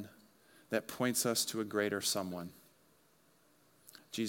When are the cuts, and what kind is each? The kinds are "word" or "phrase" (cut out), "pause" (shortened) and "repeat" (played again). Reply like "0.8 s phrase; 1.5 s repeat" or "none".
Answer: none

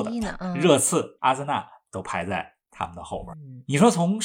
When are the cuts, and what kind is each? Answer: 1.2 s phrase

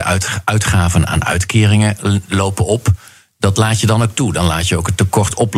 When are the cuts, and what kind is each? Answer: none

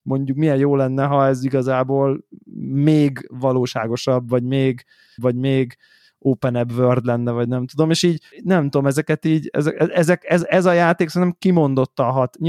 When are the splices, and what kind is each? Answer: 5.2 s repeat; 8.3 s pause

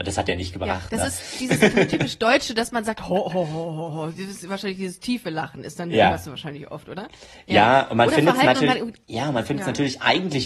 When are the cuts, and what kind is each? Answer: 9.0 s pause

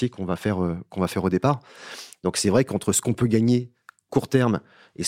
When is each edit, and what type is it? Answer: none

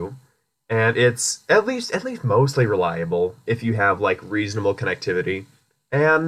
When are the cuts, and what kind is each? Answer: none

